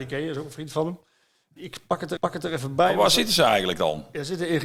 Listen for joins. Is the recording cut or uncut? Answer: cut